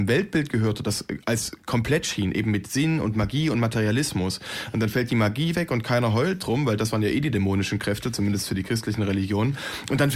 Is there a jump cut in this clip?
no; 0 cuts

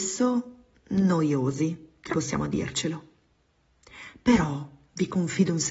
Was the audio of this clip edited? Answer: yes; 1 cut; at 2.1 s

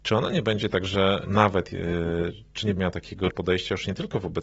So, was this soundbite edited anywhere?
yes; 3 cuts; at 1.2 s, 2.8 s, 3.3 s

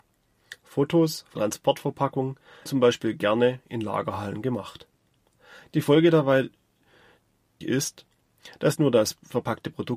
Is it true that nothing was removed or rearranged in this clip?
no; 4 cuts; at 1.4 s, 2.7 s, 7.6 s, 8.8 s

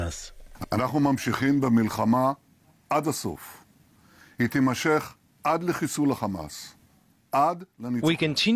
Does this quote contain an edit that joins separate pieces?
no; 0 cuts

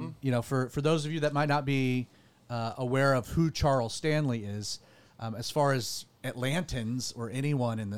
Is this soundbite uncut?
yes; 0 cuts

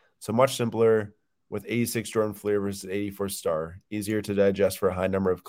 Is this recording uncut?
yes; 0 cuts

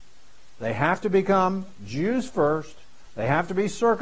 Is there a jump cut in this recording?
no; 0 cuts

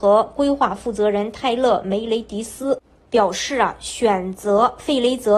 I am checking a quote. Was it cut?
no; 0 cuts

